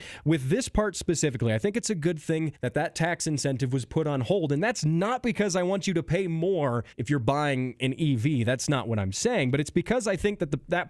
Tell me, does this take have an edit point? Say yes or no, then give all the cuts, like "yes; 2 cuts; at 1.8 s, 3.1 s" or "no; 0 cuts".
yes; 2 cuts; at 2.5 s, 6.9 s